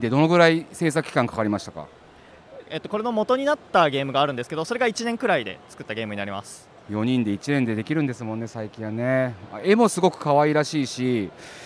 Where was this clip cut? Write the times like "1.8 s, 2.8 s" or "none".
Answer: 6.8 s